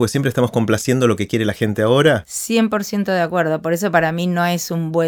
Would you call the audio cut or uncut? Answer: uncut